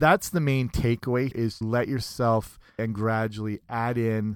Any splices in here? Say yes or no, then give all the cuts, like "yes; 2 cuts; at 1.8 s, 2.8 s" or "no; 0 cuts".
yes; 3 cuts; at 1.3 s, 1.6 s, 2.8 s